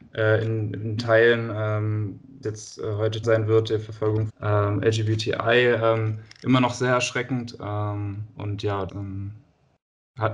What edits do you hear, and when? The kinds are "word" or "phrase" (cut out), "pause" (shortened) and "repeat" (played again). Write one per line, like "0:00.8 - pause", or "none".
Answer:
0:01.0 - word
0:02.4 - word
0:03.2 - word
0:04.3 - word
0:08.9 - word